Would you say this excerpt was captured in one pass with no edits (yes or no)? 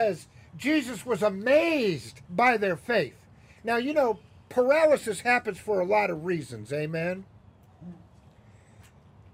no